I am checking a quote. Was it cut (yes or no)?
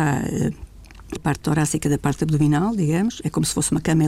yes